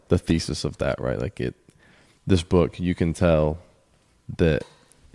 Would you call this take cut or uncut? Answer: uncut